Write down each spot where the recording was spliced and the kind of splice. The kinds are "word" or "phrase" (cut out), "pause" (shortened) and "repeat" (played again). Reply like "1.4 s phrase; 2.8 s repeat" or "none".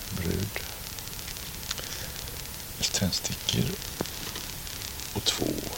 2.8 s phrase